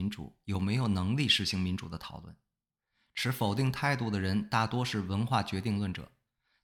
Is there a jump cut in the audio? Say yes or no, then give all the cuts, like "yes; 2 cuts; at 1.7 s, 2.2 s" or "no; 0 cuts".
no; 0 cuts